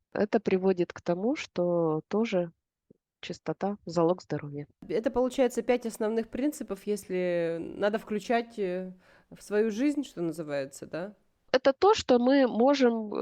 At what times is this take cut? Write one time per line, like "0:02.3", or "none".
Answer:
none